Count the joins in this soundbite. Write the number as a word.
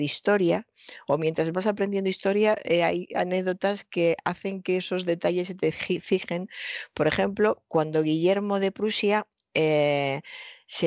zero